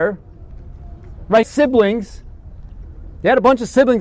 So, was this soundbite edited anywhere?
yes; 1 cut; at 1.4 s

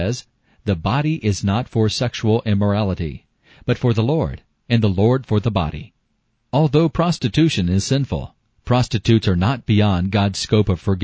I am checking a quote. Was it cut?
no; 0 cuts

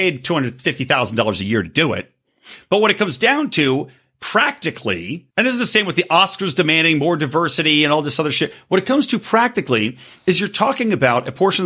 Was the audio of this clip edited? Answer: yes; 1 cut; at 5.3 s

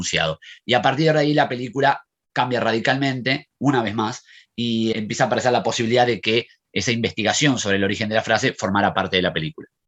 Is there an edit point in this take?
yes; 1 cut; at 4.9 s

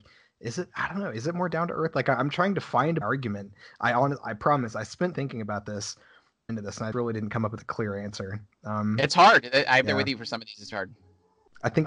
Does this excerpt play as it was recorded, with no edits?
no; 6 cuts; at 3.0 s, 5.1 s, 6.5 s, 6.9 s, 9.8 s, 10.7 s

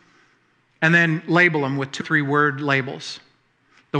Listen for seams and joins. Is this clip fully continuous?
no; 1 cut; at 2.0 s

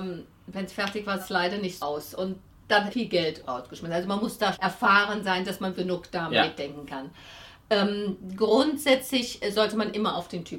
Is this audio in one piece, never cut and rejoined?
no; 6 cuts; at 1.2 s, 1.8 s, 2.9 s, 3.4 s, 4.5 s, 5.7 s

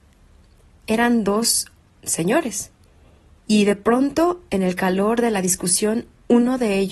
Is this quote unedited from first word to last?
yes; 0 cuts

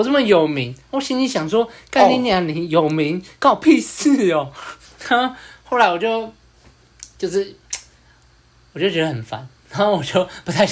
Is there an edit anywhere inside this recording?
yes; 1 cut; at 4.8 s

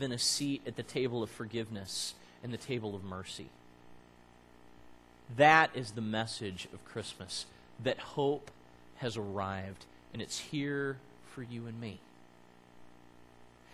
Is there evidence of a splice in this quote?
no; 0 cuts

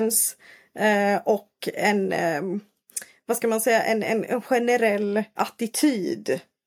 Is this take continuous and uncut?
no; 1 cut; at 5.4 s

